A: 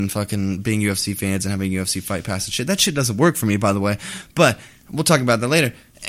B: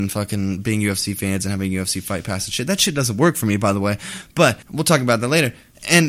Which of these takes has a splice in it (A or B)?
B